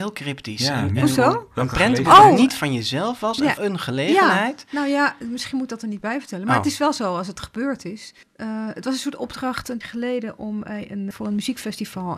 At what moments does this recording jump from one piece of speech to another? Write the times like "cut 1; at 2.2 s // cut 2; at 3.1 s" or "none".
cut 1; at 3.6 s // cut 2; at 8.2 s // cut 3; at 9.8 s // cut 4; at 11.1 s